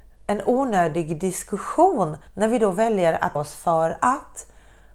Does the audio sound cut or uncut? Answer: cut